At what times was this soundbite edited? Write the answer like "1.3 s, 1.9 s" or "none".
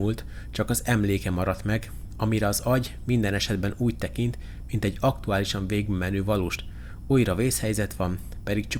6.6 s